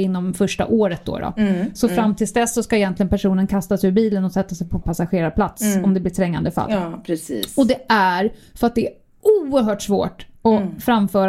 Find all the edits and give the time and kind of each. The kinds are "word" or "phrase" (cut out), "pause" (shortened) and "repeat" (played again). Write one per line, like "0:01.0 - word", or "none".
0:04.8 - word